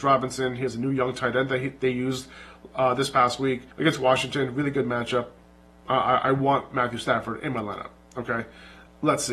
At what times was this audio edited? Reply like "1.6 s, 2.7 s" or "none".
3.7 s, 5.4 s